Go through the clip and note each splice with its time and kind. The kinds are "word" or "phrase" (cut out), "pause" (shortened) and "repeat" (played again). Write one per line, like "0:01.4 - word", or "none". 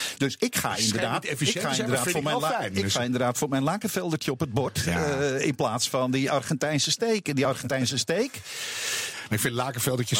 none